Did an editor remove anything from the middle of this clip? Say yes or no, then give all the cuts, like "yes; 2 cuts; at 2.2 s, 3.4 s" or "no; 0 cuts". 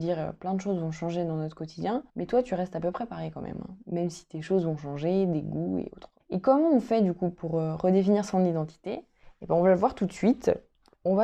yes; 2 cuts; at 2.1 s, 6.2 s